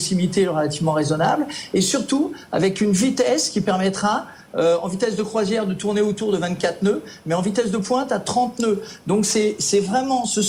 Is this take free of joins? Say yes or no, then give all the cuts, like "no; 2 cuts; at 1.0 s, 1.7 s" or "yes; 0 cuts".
yes; 0 cuts